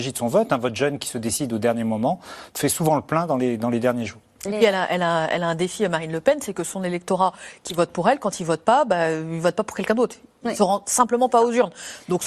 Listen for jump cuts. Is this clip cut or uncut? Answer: uncut